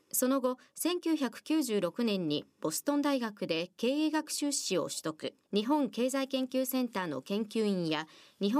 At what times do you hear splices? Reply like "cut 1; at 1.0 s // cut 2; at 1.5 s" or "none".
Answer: cut 1; at 5.4 s